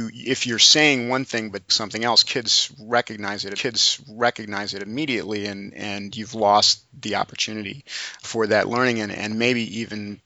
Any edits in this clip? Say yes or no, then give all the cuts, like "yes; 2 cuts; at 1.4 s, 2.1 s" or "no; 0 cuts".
yes; 3 cuts; at 1.7 s, 3.5 s, 8.2 s